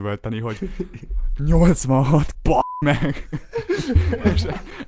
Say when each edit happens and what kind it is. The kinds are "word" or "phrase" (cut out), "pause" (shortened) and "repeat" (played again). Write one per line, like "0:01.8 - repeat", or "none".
0:02.3 - word